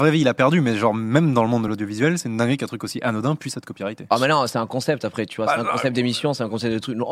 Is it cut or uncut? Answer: uncut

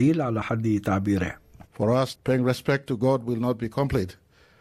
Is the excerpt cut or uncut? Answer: cut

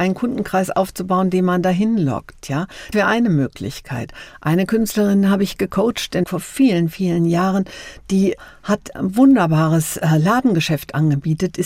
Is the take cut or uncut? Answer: cut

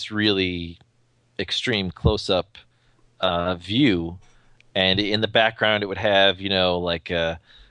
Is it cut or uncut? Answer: uncut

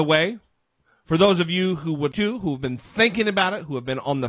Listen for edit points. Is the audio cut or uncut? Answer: cut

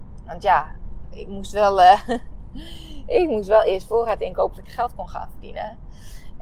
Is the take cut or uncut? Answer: cut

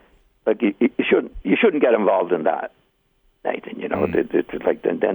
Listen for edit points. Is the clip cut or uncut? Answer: cut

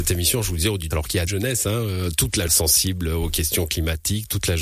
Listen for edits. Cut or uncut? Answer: cut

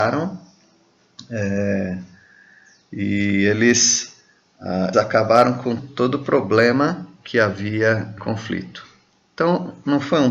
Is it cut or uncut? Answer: cut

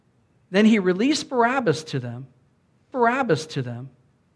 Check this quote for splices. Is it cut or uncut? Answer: cut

